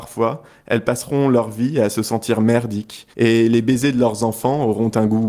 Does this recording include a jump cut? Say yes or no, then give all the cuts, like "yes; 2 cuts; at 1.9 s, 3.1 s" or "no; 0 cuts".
yes; 1 cut; at 3.1 s